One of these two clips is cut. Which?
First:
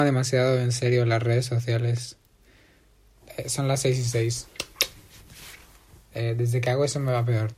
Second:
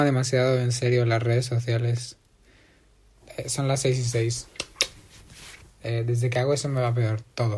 second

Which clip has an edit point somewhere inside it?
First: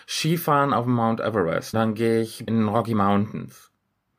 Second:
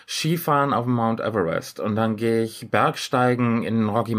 first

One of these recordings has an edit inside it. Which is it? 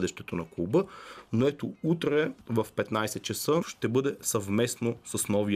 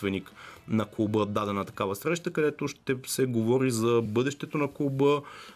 first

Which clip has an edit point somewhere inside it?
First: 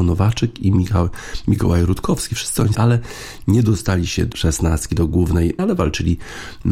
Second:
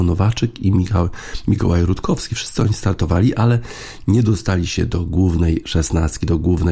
first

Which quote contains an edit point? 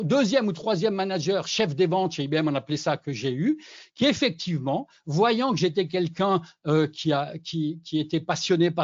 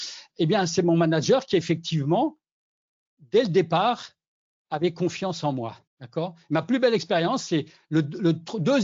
second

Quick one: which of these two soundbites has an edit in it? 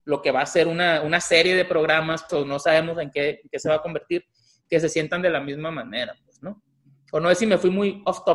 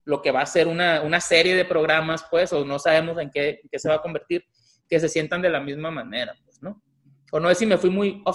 first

